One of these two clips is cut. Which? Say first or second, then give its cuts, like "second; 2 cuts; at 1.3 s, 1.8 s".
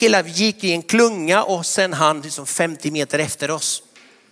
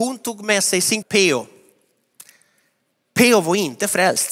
second; 1 cut; at 1.0 s